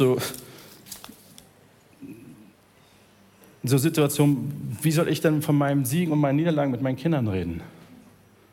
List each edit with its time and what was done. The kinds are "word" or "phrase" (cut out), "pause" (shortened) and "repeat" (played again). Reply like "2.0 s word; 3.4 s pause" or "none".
none